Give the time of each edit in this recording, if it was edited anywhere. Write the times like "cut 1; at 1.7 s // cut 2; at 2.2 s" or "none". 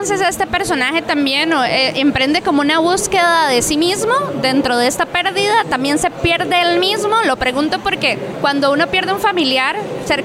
none

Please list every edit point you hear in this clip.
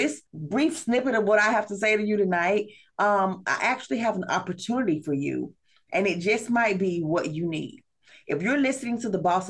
none

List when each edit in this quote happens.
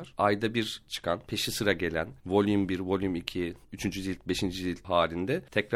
cut 1; at 2.2 s // cut 2; at 3.6 s

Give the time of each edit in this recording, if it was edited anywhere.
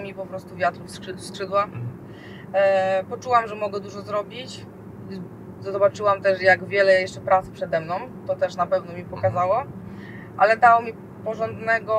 none

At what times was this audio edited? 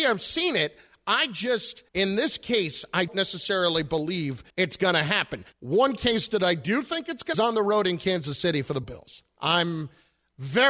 cut 1; at 1.9 s // cut 2; at 3.1 s // cut 3; at 4.5 s // cut 4; at 5.5 s // cut 5; at 7.3 s // cut 6; at 8.8 s

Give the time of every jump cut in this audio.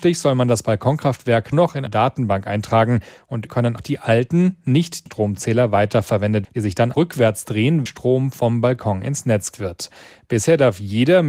cut 1; at 1.5 s // cut 2; at 1.9 s // cut 3; at 3.5 s // cut 4; at 3.8 s // cut 5; at 5.1 s // cut 6; at 6.4 s // cut 7; at 6.9 s // cut 8; at 7.9 s // cut 9; at 9.5 s

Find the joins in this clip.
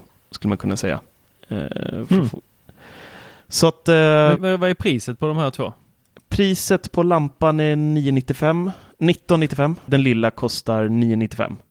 cut 1; at 4.4 s // cut 2; at 9.9 s

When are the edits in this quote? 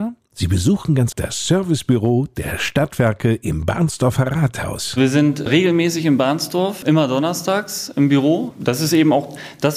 cut 1; at 1.1 s

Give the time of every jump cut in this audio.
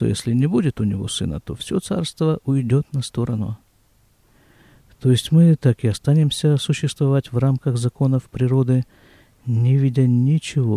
none

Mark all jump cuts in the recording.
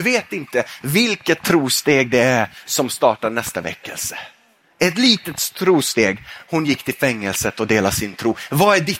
none

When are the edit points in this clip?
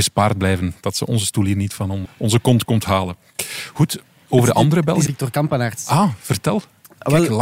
cut 1; at 2.0 s // cut 2; at 5.1 s

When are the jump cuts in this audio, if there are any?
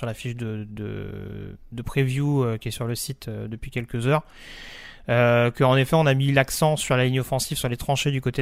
none

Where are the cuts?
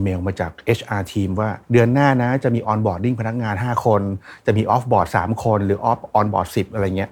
cut 1; at 1.6 s

